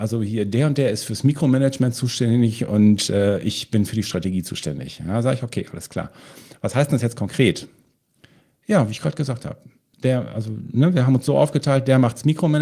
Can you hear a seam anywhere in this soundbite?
no; 0 cuts

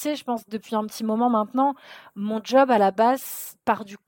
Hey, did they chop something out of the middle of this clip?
no; 0 cuts

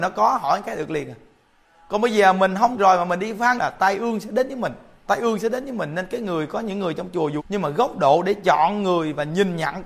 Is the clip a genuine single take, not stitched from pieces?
no; 4 cuts; at 2.7 s, 3.6 s, 5.1 s, 7.4 s

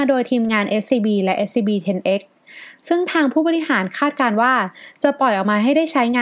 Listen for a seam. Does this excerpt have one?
no; 0 cuts

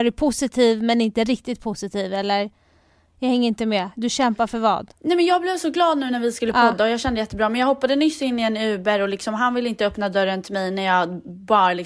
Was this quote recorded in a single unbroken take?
yes; 0 cuts

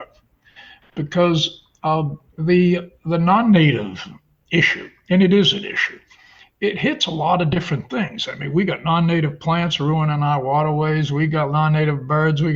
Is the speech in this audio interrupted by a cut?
no; 0 cuts

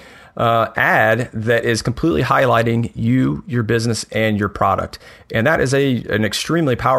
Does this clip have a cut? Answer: no; 0 cuts

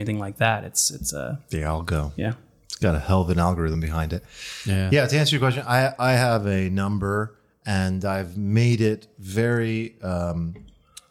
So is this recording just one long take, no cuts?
yes; 0 cuts

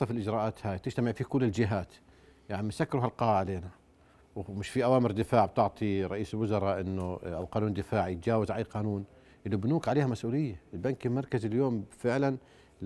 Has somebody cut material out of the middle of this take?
no; 0 cuts

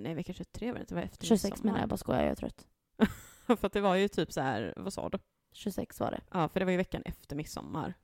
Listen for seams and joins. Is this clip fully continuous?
yes; 0 cuts

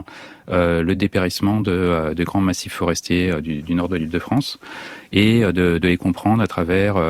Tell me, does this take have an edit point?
no; 0 cuts

